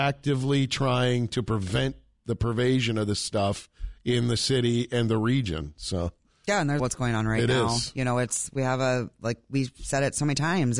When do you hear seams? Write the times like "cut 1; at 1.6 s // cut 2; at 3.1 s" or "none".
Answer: cut 1; at 6.8 s